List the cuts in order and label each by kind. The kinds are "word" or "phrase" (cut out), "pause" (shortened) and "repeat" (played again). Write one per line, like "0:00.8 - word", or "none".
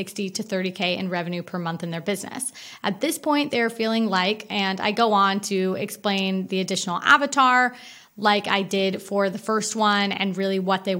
none